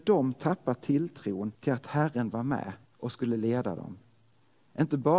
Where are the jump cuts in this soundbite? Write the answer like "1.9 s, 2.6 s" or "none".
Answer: 1.5 s, 2.8 s